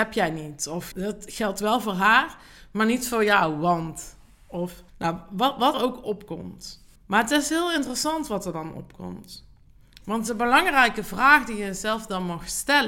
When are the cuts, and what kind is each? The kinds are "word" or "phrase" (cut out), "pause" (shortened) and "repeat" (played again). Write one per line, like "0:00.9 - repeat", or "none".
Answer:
0:00.9 - word
0:04.9 - pause
0:05.7 - word
0:07.0 - pause